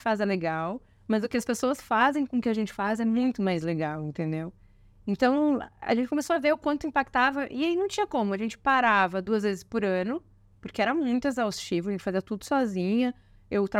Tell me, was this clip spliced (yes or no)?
no